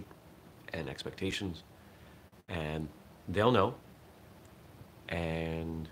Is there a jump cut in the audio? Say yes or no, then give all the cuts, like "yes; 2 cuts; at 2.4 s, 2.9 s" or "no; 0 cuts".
no; 0 cuts